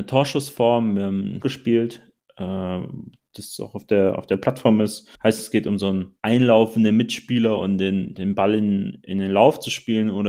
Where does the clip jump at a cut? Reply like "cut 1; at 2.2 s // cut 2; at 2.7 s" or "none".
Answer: cut 1; at 1.4 s // cut 2; at 5.2 s // cut 3; at 6.2 s